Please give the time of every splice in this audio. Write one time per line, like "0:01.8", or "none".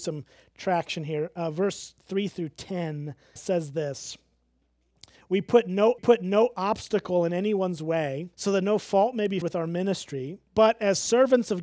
0:03.4
0:06.0
0:08.3
0:09.4
0:10.5